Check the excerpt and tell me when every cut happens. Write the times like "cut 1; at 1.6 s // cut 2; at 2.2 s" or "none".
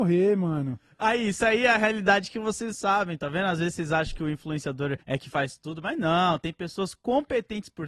cut 1; at 2.7 s // cut 2; at 5.0 s